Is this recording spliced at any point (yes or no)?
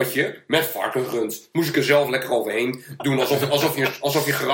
no